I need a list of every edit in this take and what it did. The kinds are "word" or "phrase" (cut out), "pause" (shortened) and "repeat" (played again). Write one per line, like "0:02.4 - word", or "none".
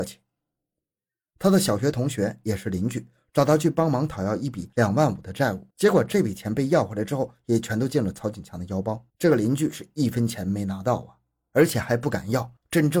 0:05.7 - pause
0:09.1 - pause